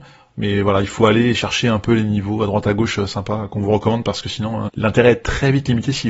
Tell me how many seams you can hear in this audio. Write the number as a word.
one